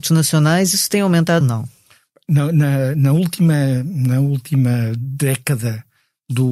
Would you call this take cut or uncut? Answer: cut